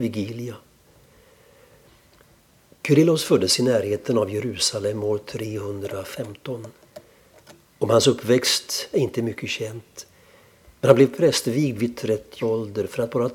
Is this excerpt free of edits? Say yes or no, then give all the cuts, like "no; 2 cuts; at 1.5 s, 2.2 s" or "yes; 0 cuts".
no; 1 cut; at 12.4 s